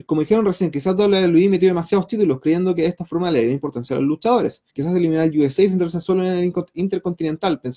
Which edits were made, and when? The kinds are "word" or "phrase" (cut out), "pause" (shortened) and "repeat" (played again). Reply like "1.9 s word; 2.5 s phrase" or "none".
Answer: 4.7 s pause